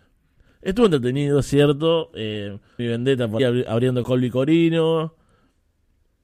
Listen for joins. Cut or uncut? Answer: cut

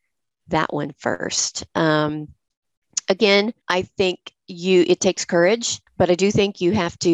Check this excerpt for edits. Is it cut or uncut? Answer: cut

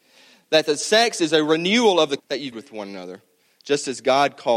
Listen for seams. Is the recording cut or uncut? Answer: cut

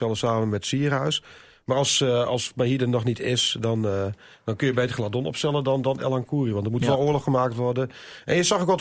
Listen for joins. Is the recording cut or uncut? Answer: uncut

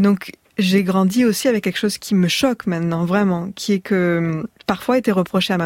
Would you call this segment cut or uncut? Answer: uncut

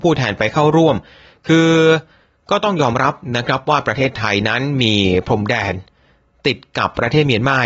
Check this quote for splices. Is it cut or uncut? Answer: uncut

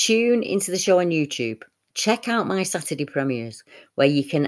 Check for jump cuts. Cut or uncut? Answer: uncut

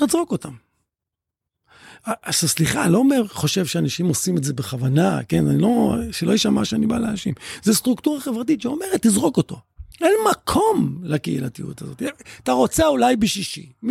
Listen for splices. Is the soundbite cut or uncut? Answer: cut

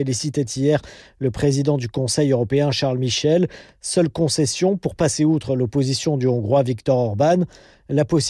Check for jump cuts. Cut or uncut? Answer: uncut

